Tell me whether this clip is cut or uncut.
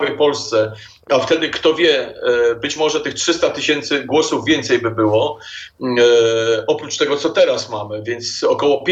uncut